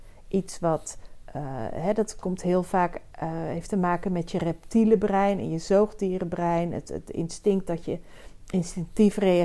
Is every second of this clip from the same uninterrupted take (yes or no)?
yes